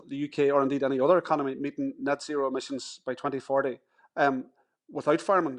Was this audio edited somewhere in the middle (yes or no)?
yes